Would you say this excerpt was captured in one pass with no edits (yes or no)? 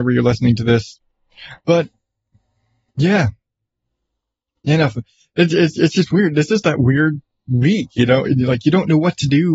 yes